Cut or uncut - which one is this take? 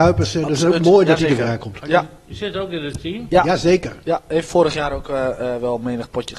uncut